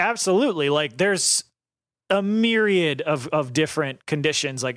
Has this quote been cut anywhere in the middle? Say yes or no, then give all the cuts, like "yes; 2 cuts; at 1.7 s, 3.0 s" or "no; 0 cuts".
no; 0 cuts